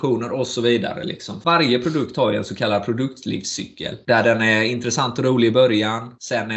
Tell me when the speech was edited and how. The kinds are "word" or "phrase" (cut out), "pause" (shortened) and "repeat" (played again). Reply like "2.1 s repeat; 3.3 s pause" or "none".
none